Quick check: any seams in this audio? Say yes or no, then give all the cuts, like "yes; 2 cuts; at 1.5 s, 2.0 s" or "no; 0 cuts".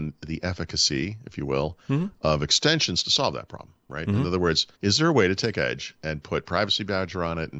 yes; 1 cut; at 4.7 s